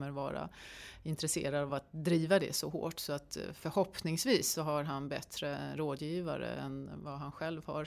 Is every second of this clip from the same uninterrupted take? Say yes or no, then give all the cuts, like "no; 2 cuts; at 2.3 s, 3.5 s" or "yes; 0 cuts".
yes; 0 cuts